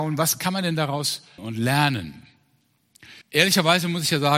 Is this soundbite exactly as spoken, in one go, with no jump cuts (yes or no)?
no